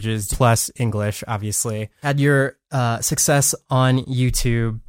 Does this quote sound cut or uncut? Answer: uncut